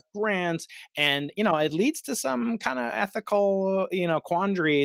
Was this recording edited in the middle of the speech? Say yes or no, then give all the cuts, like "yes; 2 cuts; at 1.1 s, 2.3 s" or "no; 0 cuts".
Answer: no; 0 cuts